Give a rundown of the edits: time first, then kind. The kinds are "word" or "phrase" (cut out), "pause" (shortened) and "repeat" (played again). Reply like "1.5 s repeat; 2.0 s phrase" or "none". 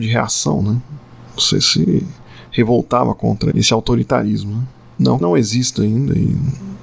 3.5 s word; 5.2 s phrase